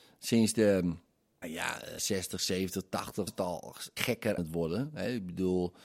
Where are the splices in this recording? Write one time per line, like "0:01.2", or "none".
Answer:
0:01.4
0:02.0
0:03.3
0:04.0
0:04.4